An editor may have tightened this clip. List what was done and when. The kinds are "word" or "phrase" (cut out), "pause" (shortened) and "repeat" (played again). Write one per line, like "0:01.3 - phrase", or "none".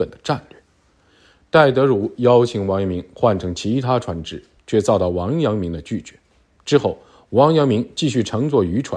none